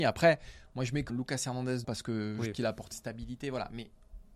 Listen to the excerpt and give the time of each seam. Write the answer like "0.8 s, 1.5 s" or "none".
1.1 s, 1.8 s, 2.5 s, 2.9 s